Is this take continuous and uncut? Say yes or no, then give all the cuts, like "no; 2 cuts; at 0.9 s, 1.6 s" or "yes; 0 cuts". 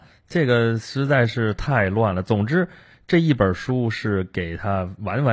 yes; 0 cuts